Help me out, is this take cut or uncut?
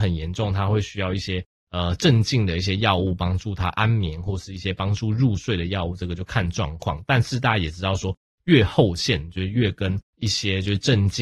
cut